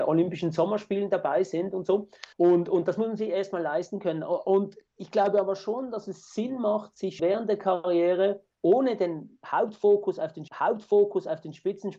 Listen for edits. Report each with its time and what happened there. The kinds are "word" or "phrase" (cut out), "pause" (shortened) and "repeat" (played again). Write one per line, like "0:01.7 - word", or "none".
0:02.3 - pause
0:07.2 - word
0:08.5 - pause
0:10.5 - repeat